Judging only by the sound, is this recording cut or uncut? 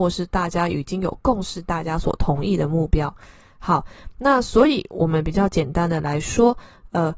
uncut